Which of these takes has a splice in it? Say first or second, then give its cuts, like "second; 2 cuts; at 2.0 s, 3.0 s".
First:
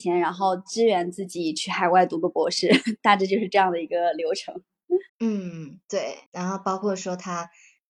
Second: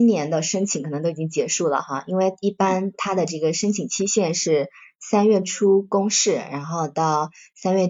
first; 2 cuts; at 5.1 s, 6.3 s